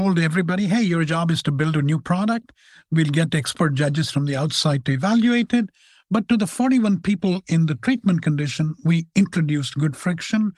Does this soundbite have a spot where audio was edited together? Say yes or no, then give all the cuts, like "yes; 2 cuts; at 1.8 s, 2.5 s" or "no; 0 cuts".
no; 0 cuts